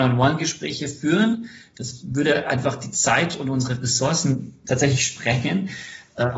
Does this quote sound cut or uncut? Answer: uncut